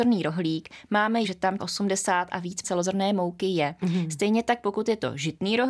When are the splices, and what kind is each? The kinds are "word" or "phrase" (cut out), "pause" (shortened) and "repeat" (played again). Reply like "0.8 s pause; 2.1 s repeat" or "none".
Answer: 1.2 s word; 1.6 s word; 2.6 s word